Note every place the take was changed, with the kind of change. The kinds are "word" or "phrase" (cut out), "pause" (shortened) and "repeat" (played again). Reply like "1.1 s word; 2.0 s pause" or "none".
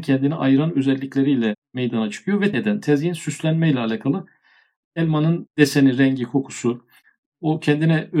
2.5 s word